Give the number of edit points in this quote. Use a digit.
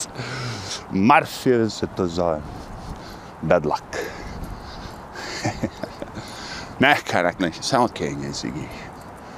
3